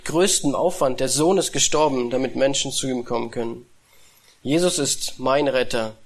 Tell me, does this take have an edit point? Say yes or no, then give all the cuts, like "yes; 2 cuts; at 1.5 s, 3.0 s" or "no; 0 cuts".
no; 0 cuts